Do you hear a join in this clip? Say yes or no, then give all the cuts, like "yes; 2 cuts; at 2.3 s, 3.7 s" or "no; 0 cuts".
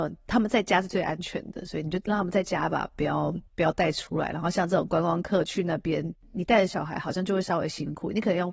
yes; 1 cut; at 3.5 s